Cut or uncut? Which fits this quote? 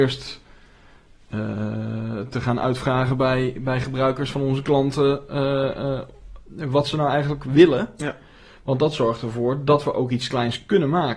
uncut